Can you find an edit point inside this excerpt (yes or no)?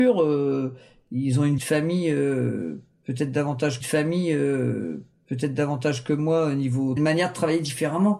yes